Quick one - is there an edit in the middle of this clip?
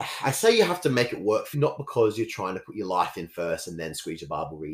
yes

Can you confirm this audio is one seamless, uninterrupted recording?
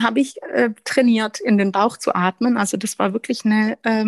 yes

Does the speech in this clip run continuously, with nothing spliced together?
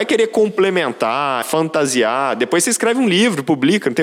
no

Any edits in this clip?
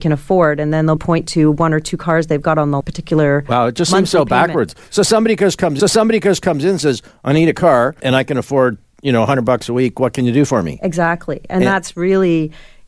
yes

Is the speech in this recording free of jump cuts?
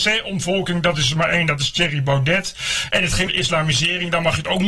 no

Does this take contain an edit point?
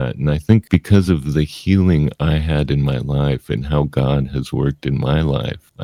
no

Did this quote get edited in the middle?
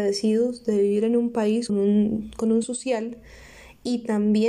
yes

